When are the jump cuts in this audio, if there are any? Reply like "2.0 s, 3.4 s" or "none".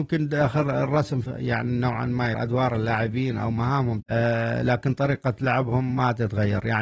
1.2 s, 2.3 s, 4.0 s